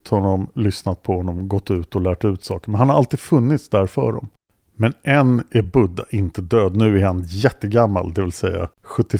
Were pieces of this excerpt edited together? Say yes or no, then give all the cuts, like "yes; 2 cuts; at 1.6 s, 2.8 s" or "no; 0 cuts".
no; 0 cuts